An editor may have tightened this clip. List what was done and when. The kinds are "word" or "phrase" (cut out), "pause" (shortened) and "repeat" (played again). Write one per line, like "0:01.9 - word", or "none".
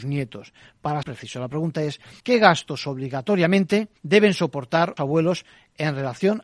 0:01.0 - word
0:02.2 - pause
0:04.0 - pause
0:05.0 - word